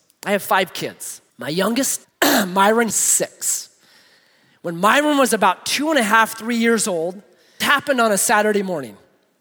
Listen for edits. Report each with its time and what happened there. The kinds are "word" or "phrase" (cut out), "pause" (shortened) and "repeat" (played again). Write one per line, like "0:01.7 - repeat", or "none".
0:01.3 - pause
0:02.0 - pause
0:02.9 - word
0:07.6 - word